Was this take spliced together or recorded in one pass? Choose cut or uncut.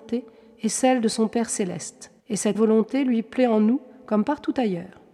cut